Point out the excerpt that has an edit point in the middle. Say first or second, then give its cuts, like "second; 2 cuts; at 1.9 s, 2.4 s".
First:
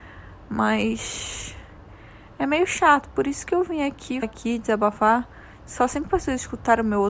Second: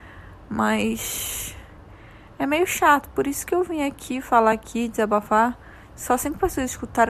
first; 1 cut; at 4.2 s